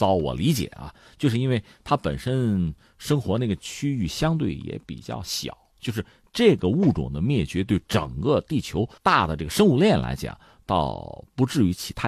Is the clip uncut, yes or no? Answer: no